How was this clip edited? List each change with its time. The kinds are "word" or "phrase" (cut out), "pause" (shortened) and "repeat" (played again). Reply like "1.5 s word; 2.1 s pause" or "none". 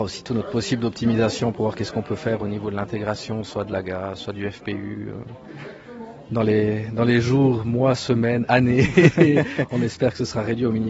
none